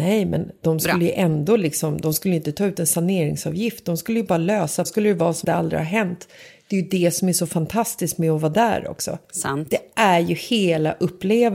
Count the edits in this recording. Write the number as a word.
three